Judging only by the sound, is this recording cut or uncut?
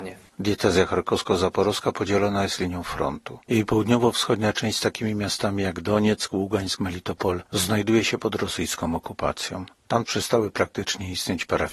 cut